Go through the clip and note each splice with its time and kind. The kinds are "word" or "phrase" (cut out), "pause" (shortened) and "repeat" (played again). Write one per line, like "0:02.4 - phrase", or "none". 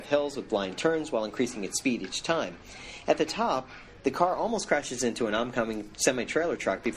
none